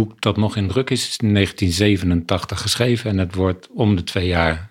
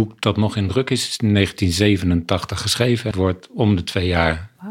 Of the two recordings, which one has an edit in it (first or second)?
second